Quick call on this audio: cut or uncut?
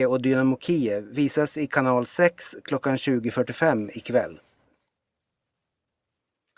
uncut